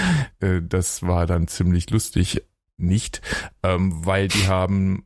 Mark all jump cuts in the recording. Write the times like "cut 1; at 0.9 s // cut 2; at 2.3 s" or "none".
none